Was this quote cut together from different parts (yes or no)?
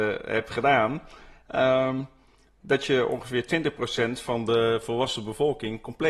no